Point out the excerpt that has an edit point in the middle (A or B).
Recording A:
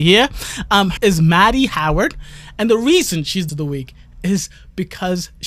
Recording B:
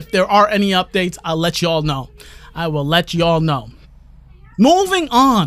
A